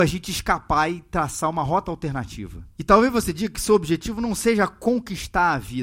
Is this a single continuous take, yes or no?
no